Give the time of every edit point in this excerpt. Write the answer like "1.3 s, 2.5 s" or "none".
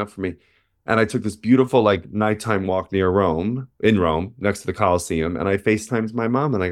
none